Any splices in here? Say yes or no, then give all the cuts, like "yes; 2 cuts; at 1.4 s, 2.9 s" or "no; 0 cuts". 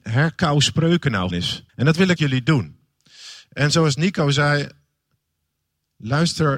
yes; 3 cuts; at 1.3 s, 1.7 s, 2.2 s